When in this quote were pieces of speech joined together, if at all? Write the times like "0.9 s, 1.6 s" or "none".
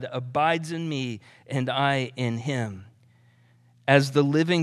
none